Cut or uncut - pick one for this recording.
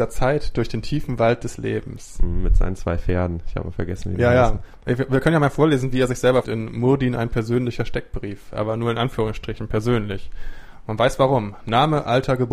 cut